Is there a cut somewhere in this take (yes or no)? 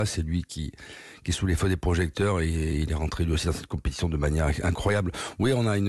no